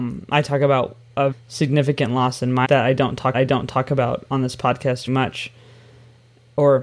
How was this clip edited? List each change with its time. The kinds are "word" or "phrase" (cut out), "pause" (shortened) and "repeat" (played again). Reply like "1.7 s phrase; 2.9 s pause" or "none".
1.3 s word; 2.6 s word; 3.3 s repeat; 5.1 s word

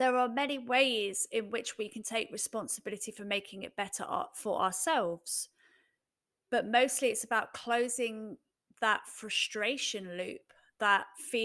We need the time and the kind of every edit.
none

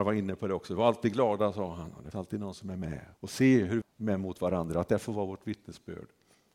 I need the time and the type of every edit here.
2.1 s word; 3.1 s pause; 3.8 s word

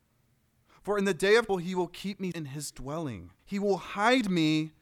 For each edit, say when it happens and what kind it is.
1.5 s word; 2.3 s word; 3.4 s pause

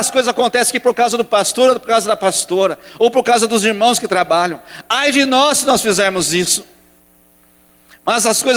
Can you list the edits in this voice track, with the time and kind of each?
none

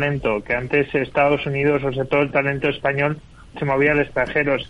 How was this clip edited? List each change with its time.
none

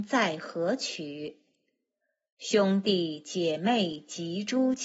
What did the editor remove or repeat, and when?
none

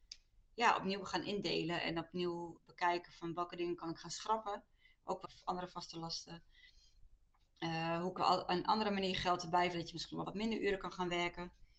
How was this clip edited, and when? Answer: 2.6 s word; 5.2 s word; 8.2 s word; 9.7 s word; 10.2 s word

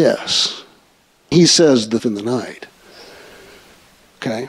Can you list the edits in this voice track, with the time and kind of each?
1.3 s word; 2.0 s word

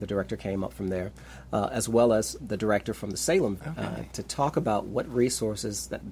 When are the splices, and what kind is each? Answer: 2.4 s word; 3.6 s word

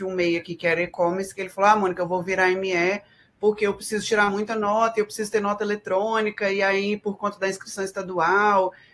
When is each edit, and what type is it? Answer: none

